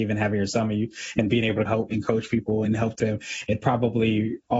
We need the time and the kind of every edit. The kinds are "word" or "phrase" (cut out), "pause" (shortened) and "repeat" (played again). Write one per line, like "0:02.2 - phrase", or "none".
0:01.9 - word
0:02.6 - word
0:03.0 - word